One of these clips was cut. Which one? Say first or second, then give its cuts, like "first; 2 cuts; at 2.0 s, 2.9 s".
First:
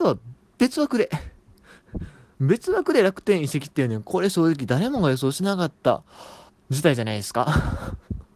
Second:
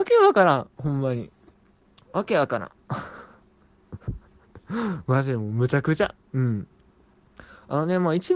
first; 1 cut; at 6.5 s